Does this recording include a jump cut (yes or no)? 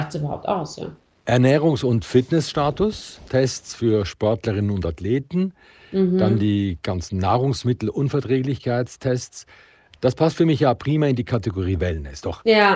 no